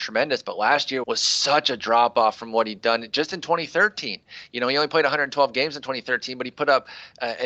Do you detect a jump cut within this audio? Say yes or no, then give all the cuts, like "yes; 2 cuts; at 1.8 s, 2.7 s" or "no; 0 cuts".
yes; 1 cut; at 1.0 s